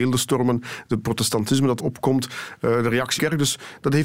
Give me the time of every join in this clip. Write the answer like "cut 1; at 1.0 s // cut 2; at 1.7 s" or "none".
cut 1; at 1.8 s // cut 2; at 3.2 s

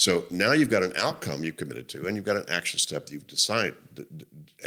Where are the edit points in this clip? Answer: none

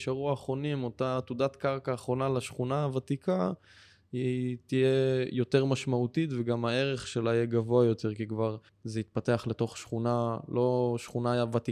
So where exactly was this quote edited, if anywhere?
cut 1; at 8.7 s

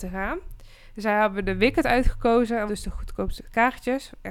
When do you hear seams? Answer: cut 1; at 2.7 s

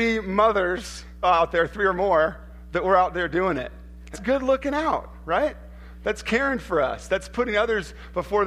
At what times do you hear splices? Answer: cut 1; at 1.2 s // cut 2; at 4.1 s

